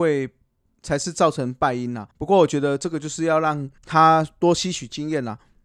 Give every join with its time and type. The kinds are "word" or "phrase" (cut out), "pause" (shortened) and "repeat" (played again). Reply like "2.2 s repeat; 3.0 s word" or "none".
2.1 s pause; 3.8 s pause